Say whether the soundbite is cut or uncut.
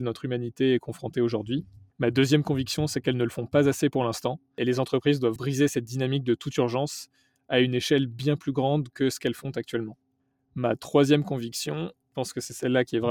cut